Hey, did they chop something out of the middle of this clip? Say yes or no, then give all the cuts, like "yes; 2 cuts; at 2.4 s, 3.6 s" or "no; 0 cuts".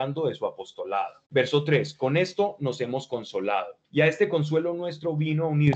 yes; 2 cuts; at 1.3 s, 3.8 s